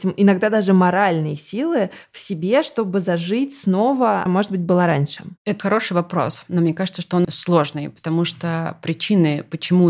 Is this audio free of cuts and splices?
no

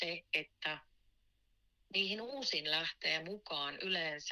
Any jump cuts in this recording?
no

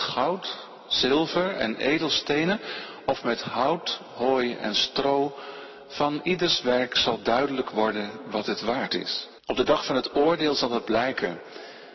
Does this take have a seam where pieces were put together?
yes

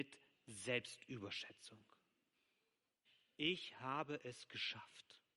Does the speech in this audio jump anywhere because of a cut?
no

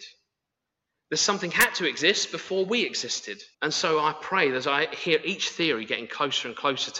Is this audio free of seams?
no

